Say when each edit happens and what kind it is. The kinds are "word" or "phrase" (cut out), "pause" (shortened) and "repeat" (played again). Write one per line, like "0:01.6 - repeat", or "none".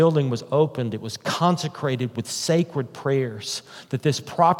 none